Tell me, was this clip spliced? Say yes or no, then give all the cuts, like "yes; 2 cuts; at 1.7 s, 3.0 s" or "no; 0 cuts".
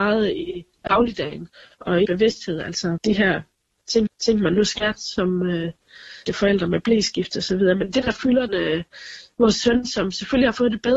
yes; 5 cuts; at 2.0 s, 3.0 s, 4.1 s, 6.3 s, 8.5 s